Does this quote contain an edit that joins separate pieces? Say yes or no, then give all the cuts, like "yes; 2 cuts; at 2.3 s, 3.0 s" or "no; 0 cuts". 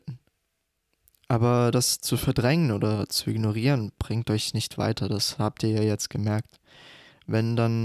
no; 0 cuts